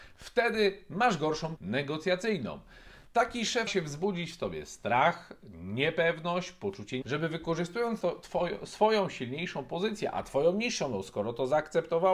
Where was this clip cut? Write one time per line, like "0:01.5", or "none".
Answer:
0:01.6
0:03.7
0:07.0
0:08.0